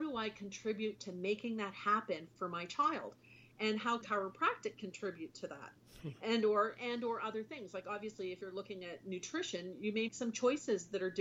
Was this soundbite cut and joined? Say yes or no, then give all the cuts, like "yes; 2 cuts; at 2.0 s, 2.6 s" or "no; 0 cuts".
yes; 2 cuts; at 4.0 s, 10.1 s